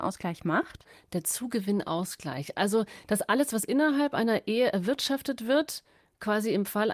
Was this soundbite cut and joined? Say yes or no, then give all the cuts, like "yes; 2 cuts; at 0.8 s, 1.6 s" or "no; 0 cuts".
no; 0 cuts